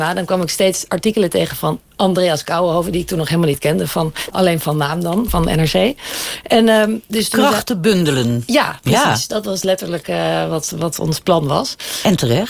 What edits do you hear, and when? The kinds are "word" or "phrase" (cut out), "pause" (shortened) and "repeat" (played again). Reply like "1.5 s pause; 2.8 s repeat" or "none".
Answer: 4.3 s phrase; 5.3 s word